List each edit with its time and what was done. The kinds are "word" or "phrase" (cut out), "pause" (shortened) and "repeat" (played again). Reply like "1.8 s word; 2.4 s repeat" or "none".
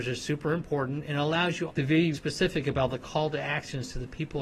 1.7 s word; 2.1 s word